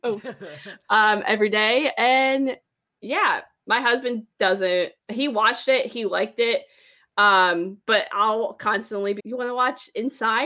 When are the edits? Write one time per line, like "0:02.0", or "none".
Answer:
0:05.0
0:09.2